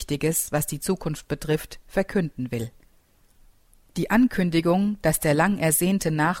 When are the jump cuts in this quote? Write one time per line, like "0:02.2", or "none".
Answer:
none